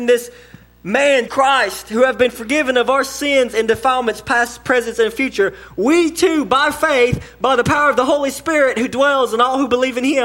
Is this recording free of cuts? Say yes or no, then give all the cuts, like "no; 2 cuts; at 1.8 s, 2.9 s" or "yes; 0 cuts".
no; 1 cut; at 1.3 s